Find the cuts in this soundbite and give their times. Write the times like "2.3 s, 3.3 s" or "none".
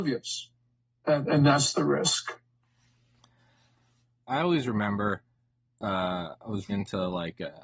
6.7 s